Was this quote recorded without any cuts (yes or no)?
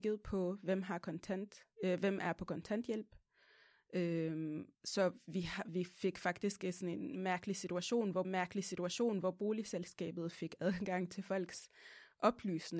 no